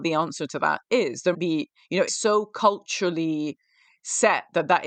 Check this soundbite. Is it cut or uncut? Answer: cut